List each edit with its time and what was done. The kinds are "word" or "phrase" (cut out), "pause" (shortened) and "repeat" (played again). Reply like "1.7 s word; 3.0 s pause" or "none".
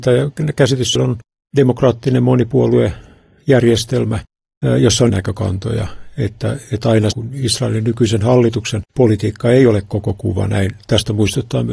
1.0 s phrase; 5.1 s word; 7.1 s phrase; 8.9 s pause

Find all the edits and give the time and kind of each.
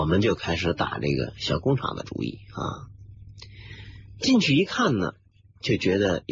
5.3 s pause

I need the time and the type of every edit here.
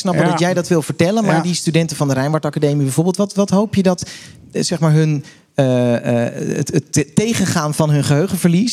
none

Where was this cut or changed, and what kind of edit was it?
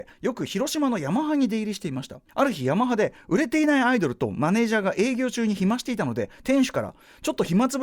2.3 s pause

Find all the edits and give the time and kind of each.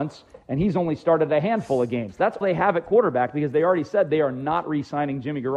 2.4 s word

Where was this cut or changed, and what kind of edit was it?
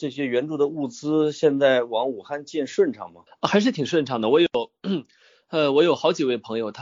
3.3 s pause

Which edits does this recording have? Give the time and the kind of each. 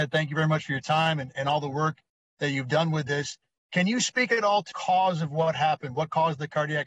4.7 s word

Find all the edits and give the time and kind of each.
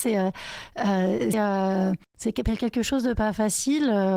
1.3 s phrase

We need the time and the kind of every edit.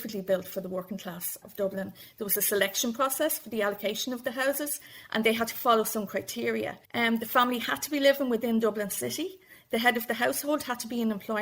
1.4 s word; 6.8 s pause

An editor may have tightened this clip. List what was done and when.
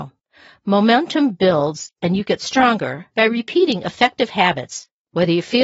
3.1 s pause

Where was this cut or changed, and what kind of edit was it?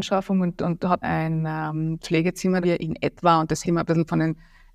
1.0 s word; 2.0 s word; 2.6 s phrase; 3.6 s word

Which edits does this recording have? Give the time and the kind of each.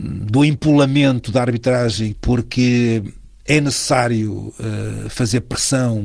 2.1 s phrase

